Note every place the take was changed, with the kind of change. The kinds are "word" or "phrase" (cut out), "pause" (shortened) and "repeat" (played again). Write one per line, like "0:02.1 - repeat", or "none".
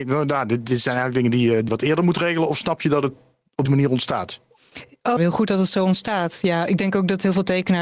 0:01.7 - word
0:03.7 - word
0:05.2 - phrase